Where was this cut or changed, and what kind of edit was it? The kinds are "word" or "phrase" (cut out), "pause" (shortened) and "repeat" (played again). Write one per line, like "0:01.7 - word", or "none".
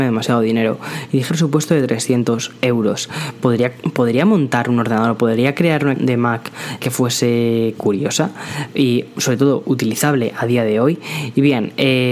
0:01.3 - phrase
0:05.9 - word
0:06.8 - word